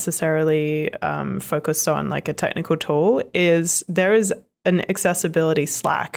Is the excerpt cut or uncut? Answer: uncut